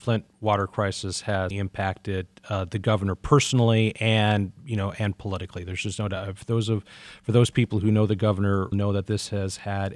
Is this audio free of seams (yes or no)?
no